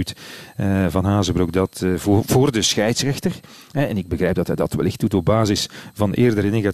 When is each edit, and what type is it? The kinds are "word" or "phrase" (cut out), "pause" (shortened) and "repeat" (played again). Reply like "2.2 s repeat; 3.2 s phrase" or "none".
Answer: none

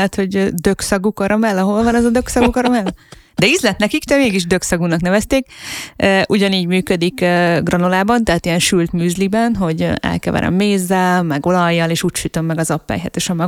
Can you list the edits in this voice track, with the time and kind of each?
none

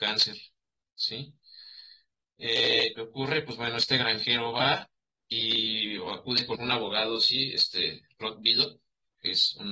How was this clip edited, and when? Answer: 3.0 s phrase; 6.6 s word

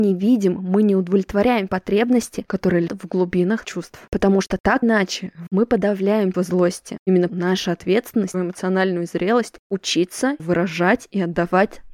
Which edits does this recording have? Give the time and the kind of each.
1.7 s word; 2.9 s word; 3.6 s word; 4.8 s word; 5.5 s word; 6.3 s word; 7.3 s word; 8.3 s word; 10.4 s word

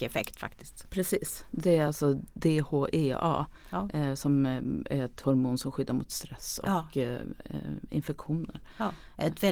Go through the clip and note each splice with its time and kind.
none

